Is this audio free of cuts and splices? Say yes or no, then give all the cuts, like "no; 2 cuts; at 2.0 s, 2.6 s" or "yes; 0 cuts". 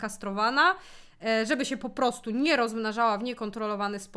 yes; 0 cuts